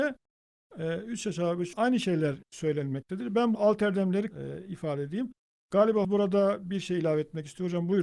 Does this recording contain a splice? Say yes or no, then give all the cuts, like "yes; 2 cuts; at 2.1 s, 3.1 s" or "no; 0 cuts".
yes; 4 cuts; at 1.7 s, 3.5 s, 4.3 s, 6.0 s